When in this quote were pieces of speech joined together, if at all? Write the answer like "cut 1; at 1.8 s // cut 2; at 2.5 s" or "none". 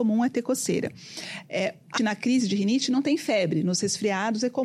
cut 1; at 2.0 s